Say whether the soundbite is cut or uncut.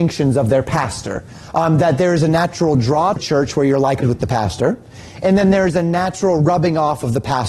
cut